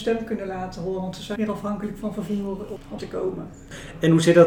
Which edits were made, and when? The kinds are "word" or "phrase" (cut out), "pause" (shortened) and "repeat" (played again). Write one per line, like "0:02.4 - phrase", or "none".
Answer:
0:01.4 - word
0:03.0 - word